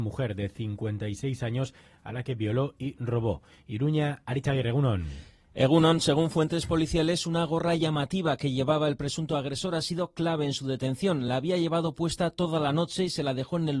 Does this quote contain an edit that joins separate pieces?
no; 0 cuts

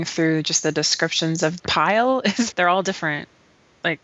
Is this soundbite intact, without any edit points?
no; 2 cuts; at 1.6 s, 2.5 s

